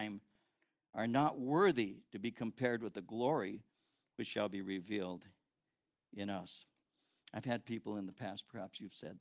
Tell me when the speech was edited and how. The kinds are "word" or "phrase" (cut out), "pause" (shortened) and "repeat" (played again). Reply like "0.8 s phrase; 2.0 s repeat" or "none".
none